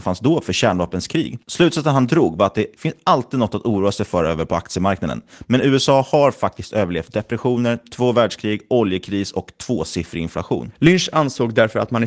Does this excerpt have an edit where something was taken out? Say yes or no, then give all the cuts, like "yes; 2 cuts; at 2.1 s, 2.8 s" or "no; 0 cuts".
no; 0 cuts